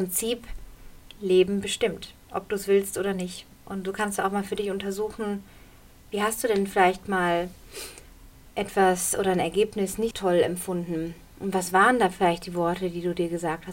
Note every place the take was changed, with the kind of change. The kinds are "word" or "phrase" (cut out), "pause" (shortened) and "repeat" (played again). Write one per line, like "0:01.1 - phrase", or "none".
0:01.2 - word
0:10.1 - word